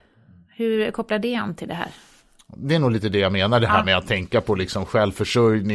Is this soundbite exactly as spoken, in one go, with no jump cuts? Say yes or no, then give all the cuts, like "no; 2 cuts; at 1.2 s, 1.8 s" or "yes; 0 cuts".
yes; 0 cuts